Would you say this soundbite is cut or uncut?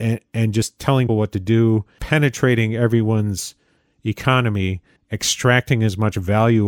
cut